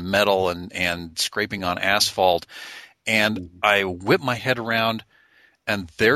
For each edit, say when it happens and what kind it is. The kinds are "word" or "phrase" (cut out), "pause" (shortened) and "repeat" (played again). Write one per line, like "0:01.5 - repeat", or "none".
none